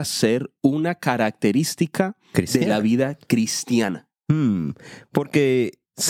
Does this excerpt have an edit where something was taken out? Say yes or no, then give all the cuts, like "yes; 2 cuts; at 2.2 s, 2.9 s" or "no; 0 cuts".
no; 0 cuts